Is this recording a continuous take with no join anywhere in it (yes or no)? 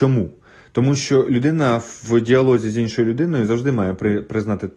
yes